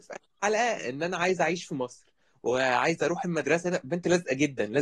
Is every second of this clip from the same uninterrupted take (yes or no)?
yes